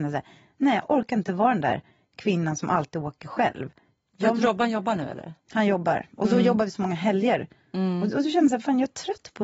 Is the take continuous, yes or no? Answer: yes